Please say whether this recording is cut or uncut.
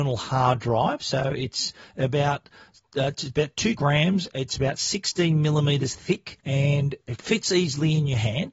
cut